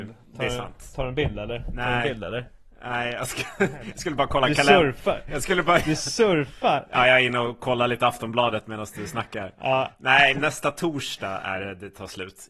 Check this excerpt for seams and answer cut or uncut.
cut